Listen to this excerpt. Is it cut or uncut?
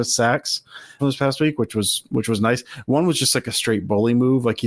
cut